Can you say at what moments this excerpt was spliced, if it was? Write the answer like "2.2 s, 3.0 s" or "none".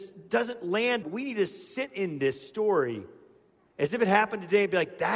1.0 s

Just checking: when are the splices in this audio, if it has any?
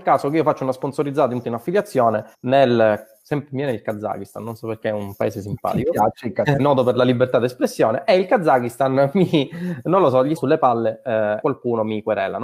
1.4 s, 2.3 s, 6.6 s, 10.4 s, 11.4 s

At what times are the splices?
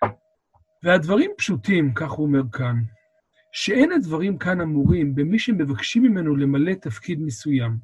none

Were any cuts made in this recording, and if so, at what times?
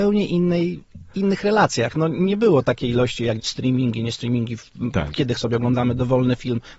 3.4 s, 5.4 s

